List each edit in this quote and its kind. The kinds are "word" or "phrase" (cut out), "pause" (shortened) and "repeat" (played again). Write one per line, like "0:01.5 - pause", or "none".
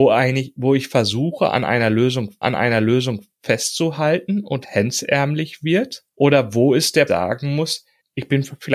0:02.4 - repeat
0:04.6 - word
0:06.1 - pause
0:07.1 - phrase

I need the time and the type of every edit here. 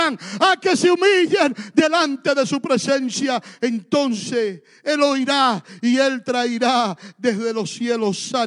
none

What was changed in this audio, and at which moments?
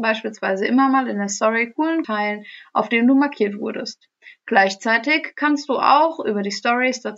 0:02.0 - word

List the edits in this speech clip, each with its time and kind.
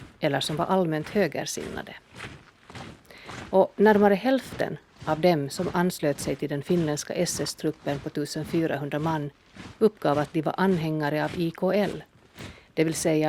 none

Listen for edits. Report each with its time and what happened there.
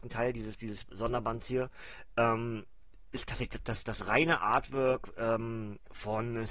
none

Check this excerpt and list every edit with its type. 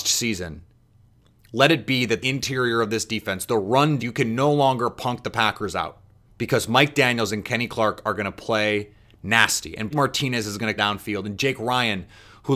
0:02.2 - word
0:04.0 - word
0:06.3 - pause
0:09.9 - word
0:10.8 - word

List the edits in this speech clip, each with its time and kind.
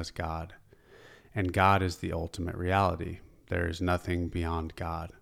none

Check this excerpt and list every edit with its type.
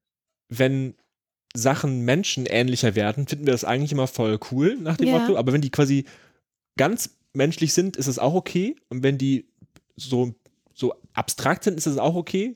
none

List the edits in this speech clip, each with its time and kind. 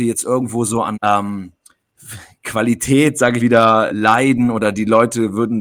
0:00.9 - word
0:03.4 - phrase
0:03.9 - word

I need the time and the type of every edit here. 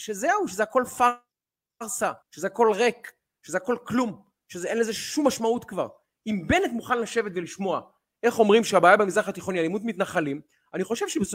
0:02.2 - pause

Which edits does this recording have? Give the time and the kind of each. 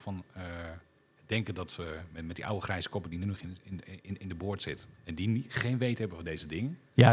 0:04.9 - pause

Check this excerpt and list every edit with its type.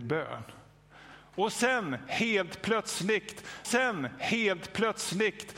0:03.6 - repeat

